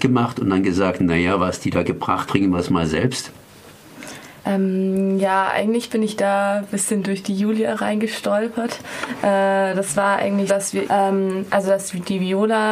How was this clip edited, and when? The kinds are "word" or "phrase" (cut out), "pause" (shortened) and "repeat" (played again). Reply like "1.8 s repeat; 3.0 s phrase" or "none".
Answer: 2.3 s phrase; 4.4 s pause; 10.5 s word; 10.8 s word